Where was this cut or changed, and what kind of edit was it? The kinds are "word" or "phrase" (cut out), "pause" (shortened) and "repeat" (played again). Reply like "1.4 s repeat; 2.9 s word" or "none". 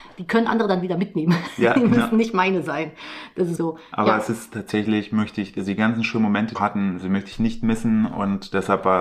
3.6 s word; 6.5 s phrase